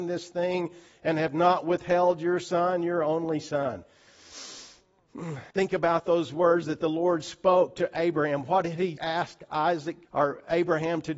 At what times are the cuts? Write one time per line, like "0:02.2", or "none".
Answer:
0:05.5
0:09.0
0:10.0

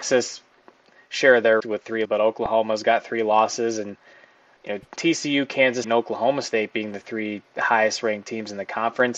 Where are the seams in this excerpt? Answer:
0:01.6
0:02.0
0:04.6
0:05.0
0:05.8

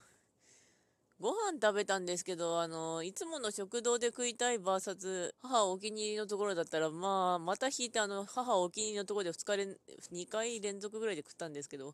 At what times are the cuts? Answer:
0:05.4

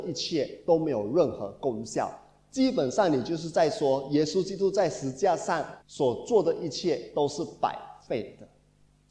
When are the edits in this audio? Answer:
0:05.8

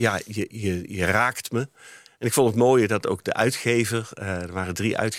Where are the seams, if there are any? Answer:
none

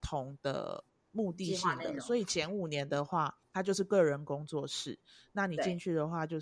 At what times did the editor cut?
0:03.4

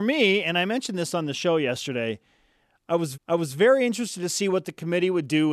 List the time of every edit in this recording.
0:03.1

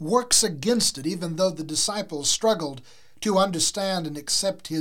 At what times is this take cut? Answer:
none

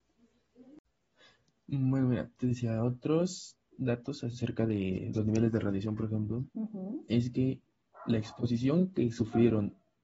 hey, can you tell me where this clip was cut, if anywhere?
0:06.5

